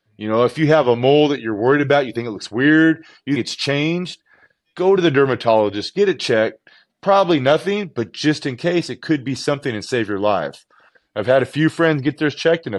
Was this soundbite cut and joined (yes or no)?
yes